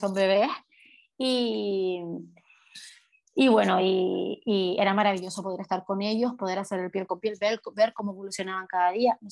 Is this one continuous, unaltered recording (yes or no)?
yes